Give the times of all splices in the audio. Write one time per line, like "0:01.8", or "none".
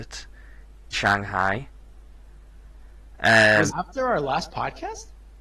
0:00.9
0:03.7